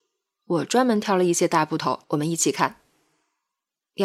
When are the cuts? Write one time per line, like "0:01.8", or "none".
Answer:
0:02.0